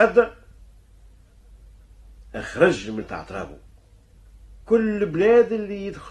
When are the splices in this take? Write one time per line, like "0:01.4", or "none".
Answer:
0:02.3
0:03.0
0:04.6